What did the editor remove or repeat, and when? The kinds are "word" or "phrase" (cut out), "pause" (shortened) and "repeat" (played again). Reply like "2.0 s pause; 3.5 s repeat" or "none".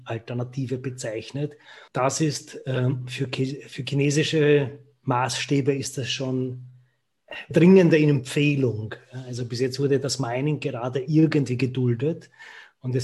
1.9 s pause; 7.5 s phrase